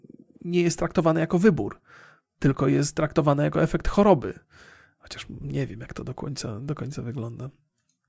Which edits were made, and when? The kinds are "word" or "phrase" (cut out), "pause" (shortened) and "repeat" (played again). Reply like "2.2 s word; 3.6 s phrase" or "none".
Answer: none